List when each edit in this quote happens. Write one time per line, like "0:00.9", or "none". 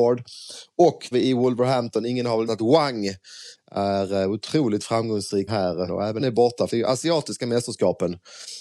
0:01.1
0:02.5
0:05.5
0:05.9
0:06.2
0:06.7